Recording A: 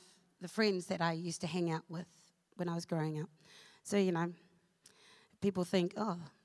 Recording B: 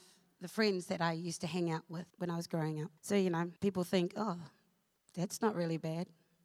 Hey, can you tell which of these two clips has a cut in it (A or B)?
B